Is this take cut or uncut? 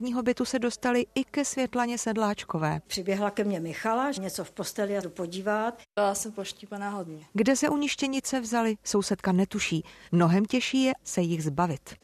cut